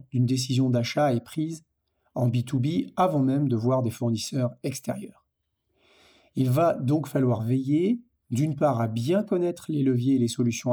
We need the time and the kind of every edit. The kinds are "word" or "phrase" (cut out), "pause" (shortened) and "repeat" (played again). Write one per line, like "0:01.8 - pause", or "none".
none